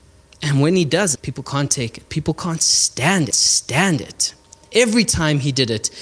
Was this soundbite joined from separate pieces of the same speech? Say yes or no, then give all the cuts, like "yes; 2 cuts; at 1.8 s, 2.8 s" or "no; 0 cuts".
yes; 2 cuts; at 1.1 s, 3.3 s